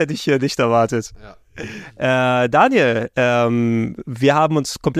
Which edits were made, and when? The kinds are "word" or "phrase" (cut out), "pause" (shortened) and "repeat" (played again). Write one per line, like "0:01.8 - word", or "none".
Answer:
none